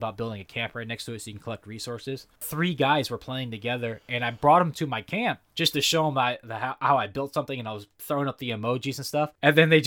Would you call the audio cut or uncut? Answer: uncut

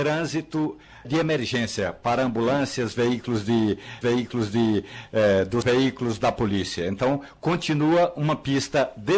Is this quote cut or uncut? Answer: cut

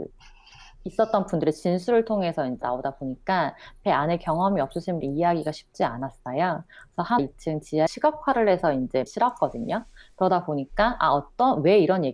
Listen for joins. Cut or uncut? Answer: cut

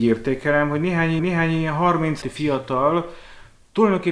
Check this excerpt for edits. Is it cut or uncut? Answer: cut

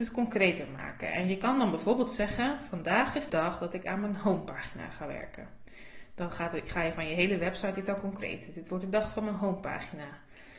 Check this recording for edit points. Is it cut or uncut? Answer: cut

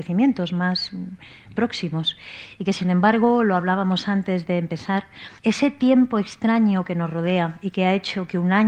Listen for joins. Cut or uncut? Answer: cut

